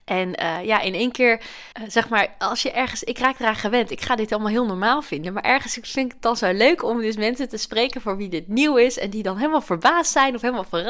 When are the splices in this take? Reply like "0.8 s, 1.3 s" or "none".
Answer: 1.7 s

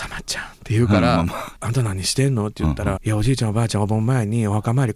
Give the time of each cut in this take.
1.6 s, 3.0 s

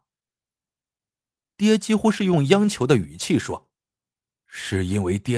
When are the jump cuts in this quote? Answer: 3.8 s

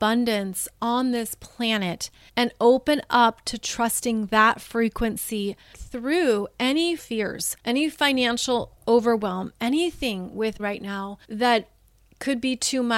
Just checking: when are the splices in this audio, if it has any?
2.3 s, 5.7 s, 7.0 s, 7.6 s, 10.6 s, 11.2 s

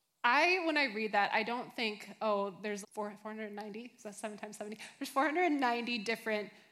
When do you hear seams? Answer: 2.8 s

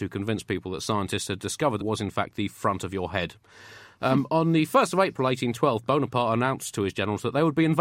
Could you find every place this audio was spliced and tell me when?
1.8 s

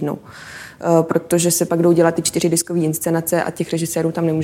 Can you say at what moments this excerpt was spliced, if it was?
1.7 s

